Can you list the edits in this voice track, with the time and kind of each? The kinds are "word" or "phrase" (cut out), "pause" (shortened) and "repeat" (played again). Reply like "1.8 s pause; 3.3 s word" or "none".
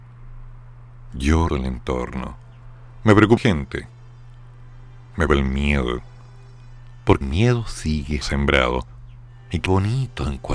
1.5 s word; 3.4 s word; 5.3 s word; 7.2 s word; 8.2 s word; 9.7 s word